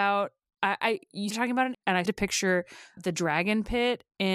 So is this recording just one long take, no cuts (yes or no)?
no